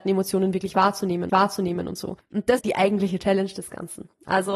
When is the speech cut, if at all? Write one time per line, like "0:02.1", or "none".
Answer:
0:01.3
0:02.2
0:02.6